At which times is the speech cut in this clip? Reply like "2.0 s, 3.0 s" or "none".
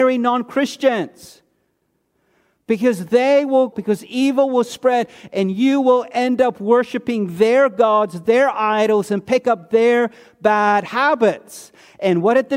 3.7 s